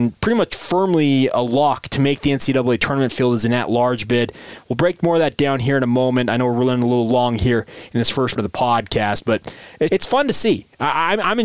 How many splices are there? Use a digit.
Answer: 2